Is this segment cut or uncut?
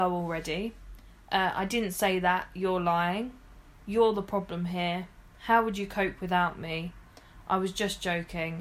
uncut